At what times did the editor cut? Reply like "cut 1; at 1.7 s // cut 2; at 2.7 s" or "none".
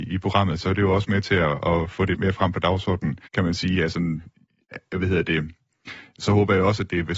cut 1; at 2.1 s // cut 2; at 3.3 s

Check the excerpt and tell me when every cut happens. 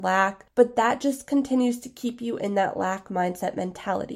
none

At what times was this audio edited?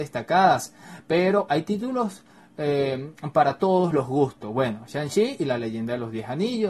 none

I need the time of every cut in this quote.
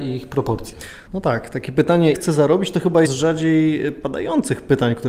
cut 1; at 1.1 s // cut 2; at 2.1 s // cut 3; at 3.0 s

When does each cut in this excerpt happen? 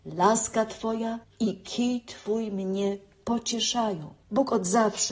cut 1; at 1.2 s // cut 2; at 4.2 s

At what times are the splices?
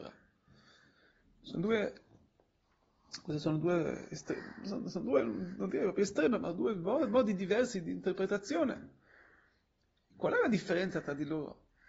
none

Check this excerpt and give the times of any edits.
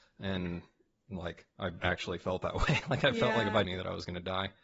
cut 1; at 3.6 s

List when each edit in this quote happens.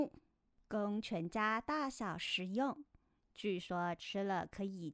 none

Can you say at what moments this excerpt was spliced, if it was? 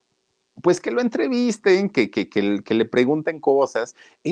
none

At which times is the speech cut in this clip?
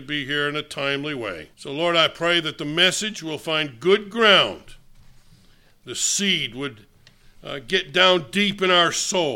cut 1; at 1.5 s

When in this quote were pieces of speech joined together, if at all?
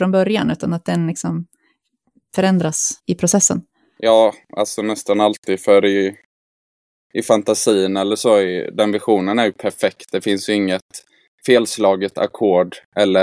cut 1; at 3.0 s

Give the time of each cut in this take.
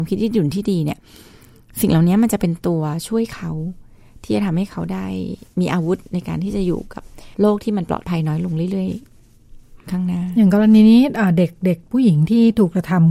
cut 1; at 7.3 s

